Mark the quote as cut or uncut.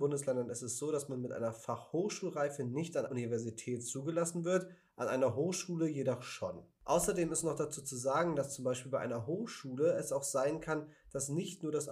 cut